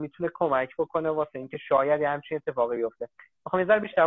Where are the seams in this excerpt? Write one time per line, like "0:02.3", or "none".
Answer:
none

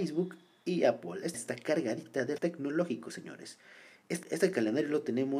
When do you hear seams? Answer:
0:01.3
0:02.4
0:04.2

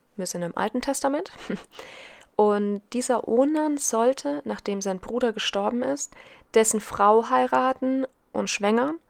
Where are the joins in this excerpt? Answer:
none

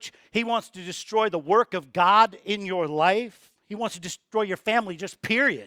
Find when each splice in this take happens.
none

